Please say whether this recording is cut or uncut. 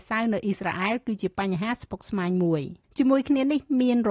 cut